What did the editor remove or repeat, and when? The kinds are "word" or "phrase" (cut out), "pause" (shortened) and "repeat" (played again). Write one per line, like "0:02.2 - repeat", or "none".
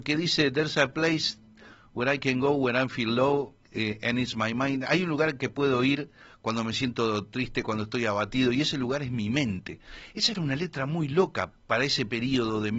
0:03.6 - pause
0:11.5 - word